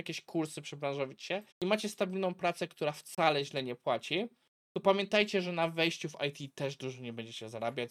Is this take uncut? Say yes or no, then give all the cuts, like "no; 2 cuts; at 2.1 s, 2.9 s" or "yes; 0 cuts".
no; 1 cut; at 1.5 s